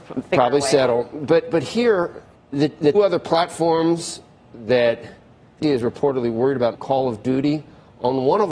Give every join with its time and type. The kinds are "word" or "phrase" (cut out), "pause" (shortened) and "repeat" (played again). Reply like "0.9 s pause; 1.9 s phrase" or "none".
2.4 s pause; 2.9 s word; 5.6 s word; 6.7 s phrase